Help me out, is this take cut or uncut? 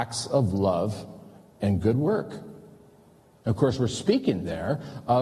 uncut